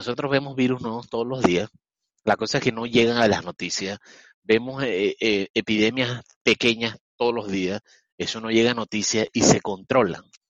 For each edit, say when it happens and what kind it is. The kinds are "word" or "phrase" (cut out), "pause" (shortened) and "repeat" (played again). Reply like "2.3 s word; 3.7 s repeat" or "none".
none